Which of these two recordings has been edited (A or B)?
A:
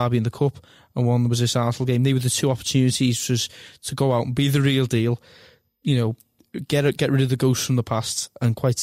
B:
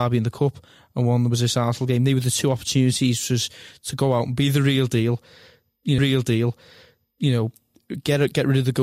B